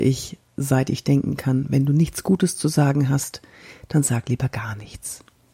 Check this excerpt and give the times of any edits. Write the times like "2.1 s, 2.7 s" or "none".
none